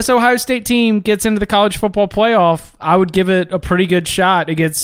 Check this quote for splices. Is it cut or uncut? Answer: uncut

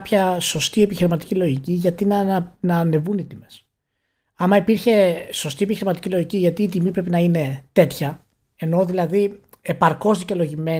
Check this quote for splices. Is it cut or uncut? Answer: uncut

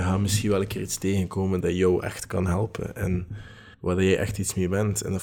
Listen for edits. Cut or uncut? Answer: cut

